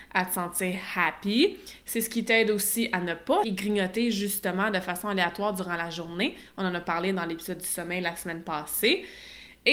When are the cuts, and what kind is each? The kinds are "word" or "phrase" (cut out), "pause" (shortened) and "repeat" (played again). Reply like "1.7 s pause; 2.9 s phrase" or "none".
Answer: 3.4 s word